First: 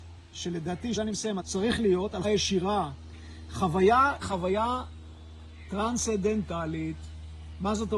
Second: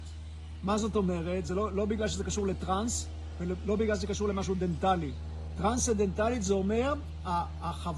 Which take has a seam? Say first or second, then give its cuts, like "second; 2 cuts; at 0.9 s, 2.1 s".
first; 4 cuts; at 1.0 s, 1.4 s, 2.2 s, 4.2 s